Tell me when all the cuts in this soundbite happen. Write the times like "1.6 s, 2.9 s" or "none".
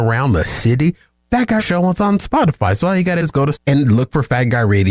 1.6 s, 3.2 s, 3.5 s